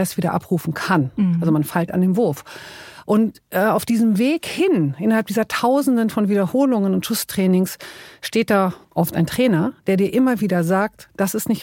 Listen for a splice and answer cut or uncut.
cut